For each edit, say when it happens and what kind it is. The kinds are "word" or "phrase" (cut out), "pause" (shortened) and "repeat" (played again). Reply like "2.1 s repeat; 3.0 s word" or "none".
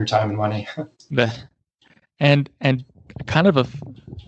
0.9 s pause